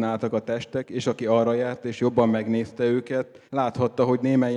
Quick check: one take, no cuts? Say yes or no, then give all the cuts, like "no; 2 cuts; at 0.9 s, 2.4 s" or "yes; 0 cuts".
no; 1 cut; at 3.5 s